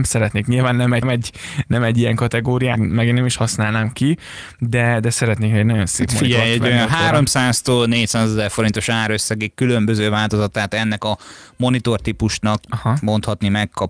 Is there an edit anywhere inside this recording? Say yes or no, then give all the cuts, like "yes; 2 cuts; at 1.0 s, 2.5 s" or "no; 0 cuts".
yes; 2 cuts; at 1.0 s, 2.8 s